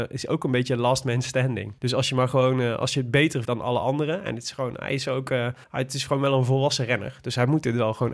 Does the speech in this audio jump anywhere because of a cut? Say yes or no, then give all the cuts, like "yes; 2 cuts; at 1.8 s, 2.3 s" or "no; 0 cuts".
yes; 3 cuts; at 1.8 s, 3.4 s, 5.6 s